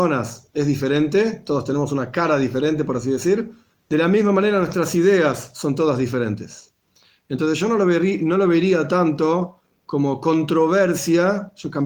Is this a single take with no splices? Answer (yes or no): no